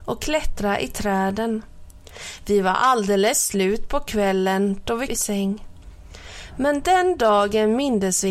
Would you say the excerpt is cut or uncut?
cut